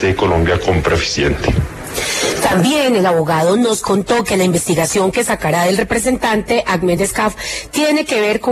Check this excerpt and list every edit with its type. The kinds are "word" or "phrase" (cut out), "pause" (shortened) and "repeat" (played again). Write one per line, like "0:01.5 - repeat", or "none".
none